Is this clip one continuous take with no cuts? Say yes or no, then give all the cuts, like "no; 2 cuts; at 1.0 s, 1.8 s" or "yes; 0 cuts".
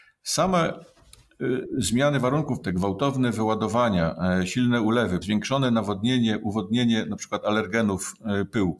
no; 2 cuts; at 2.6 s, 5.2 s